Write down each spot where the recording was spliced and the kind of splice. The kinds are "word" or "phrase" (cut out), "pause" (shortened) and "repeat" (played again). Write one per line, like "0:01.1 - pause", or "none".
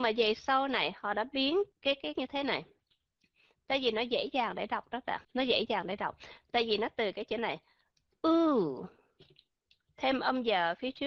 0:02.2 - phrase
0:05.2 - pause